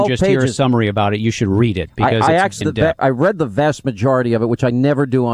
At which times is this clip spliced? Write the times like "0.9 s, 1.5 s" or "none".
2.6 s, 3.0 s